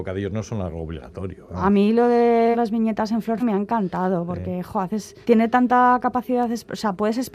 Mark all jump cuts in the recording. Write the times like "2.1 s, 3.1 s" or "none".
2.5 s, 3.4 s, 5.2 s